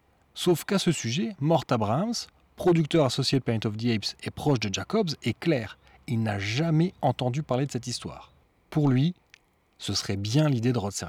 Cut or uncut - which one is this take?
uncut